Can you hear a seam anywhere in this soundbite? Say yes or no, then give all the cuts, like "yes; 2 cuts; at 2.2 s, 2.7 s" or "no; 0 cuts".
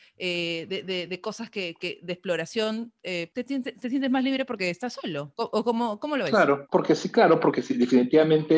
no; 0 cuts